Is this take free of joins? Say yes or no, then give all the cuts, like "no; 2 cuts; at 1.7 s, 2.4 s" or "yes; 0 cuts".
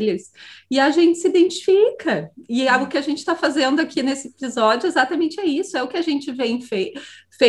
yes; 0 cuts